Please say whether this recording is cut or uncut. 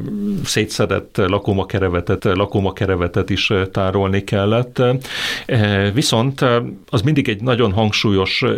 cut